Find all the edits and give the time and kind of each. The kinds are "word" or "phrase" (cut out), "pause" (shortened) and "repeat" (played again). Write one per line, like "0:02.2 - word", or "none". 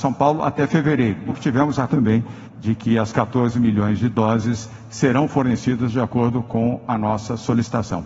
0:01.3 - word
0:01.9 - word